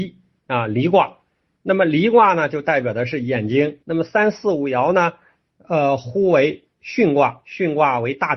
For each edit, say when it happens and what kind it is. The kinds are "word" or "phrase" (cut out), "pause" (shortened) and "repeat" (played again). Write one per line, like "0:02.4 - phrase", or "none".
0:03.8 - pause